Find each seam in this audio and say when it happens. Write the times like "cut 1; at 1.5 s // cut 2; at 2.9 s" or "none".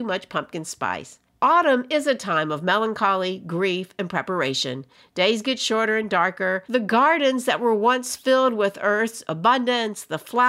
none